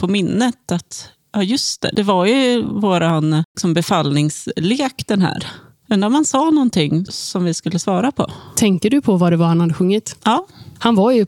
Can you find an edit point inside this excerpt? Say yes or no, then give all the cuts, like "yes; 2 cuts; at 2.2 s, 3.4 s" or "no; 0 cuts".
no; 0 cuts